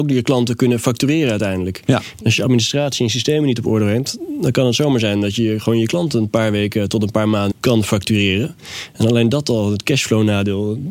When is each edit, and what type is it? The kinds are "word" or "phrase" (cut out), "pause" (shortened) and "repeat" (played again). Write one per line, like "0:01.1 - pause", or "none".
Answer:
0:07.5 - word